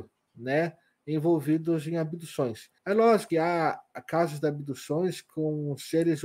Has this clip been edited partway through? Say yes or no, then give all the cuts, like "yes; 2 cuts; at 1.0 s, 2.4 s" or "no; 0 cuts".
yes; 2 cuts; at 2.8 s, 3.3 s